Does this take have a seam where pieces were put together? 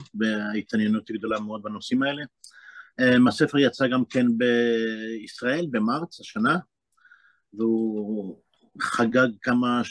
no; 0 cuts

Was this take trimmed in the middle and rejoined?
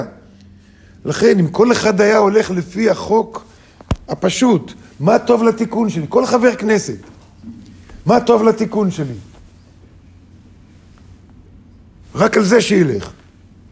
no; 0 cuts

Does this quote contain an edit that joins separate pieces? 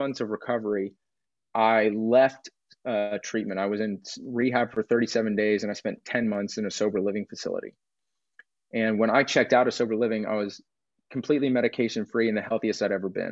no; 0 cuts

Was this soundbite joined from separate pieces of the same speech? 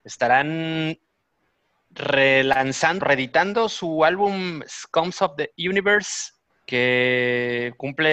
yes; 2 cuts; at 3.0 s, 6.5 s

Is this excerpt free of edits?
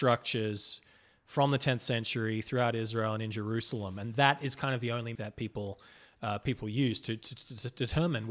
no; 1 cut; at 5.2 s

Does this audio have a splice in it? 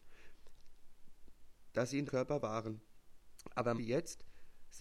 yes; 2 cuts; at 2.1 s, 3.8 s

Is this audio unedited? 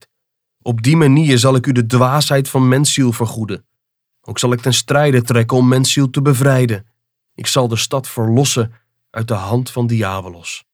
yes; 0 cuts

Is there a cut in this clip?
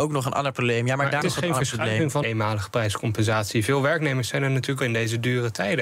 yes; 3 cuts; at 1.2 s, 2.2 s, 4.8 s

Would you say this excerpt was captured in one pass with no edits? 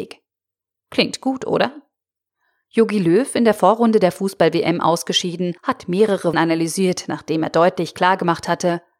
no; 2 cuts; at 5.6 s, 6.3 s

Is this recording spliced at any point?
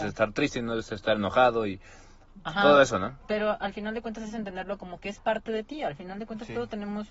no; 0 cuts

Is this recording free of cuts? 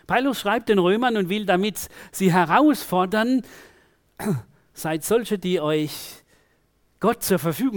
yes; 0 cuts

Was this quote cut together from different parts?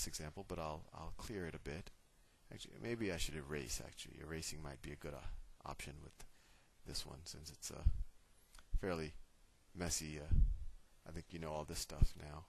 no; 0 cuts

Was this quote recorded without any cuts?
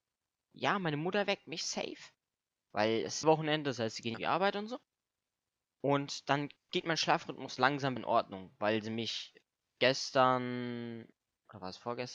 no; 3 cuts; at 3.2 s, 4.1 s, 8.0 s

